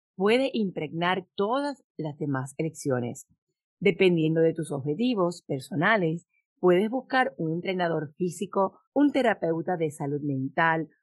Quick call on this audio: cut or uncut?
cut